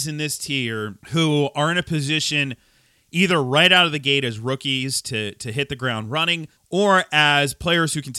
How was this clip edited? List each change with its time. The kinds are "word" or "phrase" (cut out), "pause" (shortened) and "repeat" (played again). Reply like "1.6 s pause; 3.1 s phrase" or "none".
1.0 s pause; 6.6 s pause